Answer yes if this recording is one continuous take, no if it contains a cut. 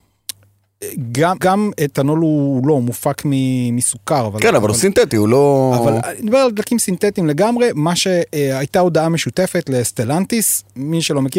no